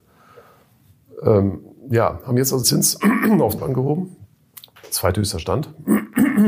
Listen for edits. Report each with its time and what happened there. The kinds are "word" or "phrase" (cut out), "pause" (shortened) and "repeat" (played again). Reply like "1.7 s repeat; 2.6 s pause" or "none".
2.6 s word; 3.6 s word

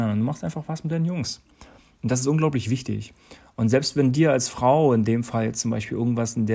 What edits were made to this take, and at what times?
none

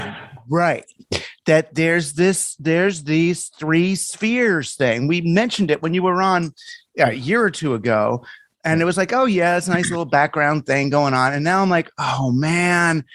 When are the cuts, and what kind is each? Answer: none

